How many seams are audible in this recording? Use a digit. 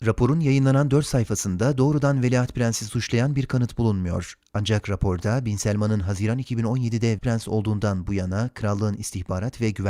1